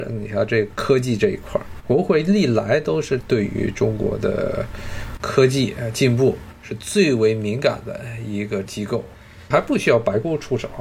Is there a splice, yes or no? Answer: yes